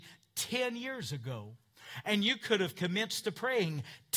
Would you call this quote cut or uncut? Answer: uncut